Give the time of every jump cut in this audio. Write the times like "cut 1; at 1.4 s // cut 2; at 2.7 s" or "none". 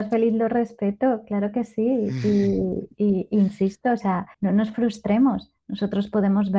cut 1; at 4.3 s // cut 2; at 5.6 s